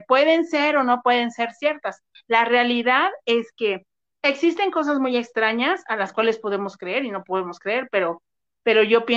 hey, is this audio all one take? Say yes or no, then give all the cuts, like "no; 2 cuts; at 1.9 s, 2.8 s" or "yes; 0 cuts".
yes; 0 cuts